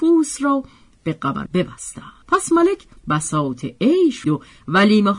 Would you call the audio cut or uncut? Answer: cut